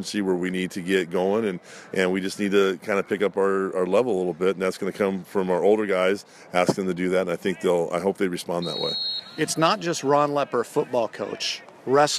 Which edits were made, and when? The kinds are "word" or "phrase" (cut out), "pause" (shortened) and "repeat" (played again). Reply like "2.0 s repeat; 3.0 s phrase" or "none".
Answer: none